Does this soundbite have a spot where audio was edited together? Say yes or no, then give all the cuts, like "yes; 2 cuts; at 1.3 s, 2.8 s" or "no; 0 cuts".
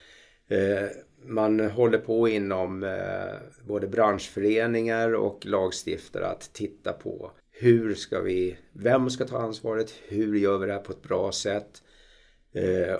yes; 2 cuts; at 3.5 s, 7.4 s